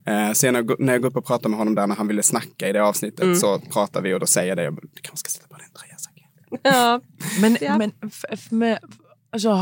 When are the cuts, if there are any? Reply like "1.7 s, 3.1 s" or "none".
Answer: none